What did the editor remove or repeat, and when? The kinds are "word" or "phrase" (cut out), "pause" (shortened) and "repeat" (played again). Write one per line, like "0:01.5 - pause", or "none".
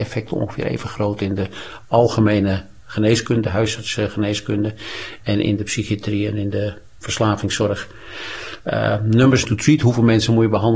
0:09.4 - word